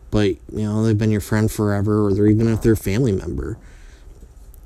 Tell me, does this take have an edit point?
no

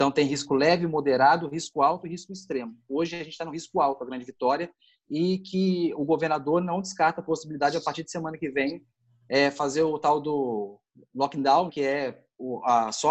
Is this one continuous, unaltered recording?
no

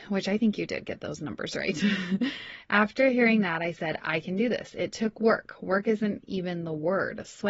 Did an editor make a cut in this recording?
no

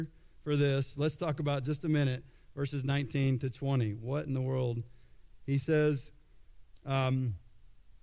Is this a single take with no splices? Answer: yes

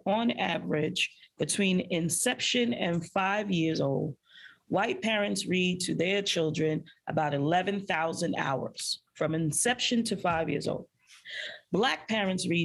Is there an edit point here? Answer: no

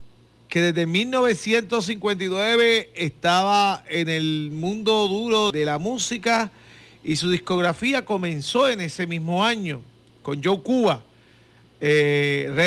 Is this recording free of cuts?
no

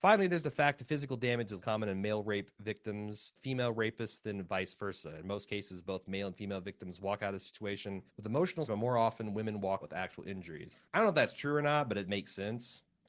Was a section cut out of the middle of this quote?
yes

